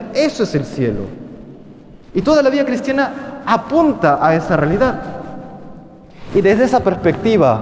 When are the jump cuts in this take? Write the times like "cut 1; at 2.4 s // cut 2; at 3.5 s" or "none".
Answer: cut 1; at 2.0 s